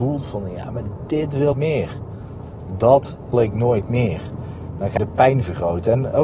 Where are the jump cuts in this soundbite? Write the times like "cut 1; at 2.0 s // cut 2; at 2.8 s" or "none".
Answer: cut 1; at 1.5 s // cut 2; at 3.3 s // cut 3; at 5.0 s